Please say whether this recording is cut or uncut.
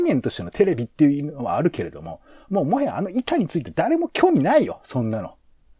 uncut